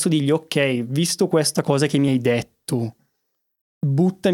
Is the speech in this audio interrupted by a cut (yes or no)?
no